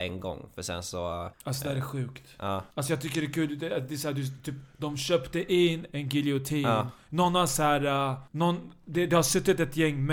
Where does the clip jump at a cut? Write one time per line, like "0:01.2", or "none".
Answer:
0:01.3
0:02.7
0:08.3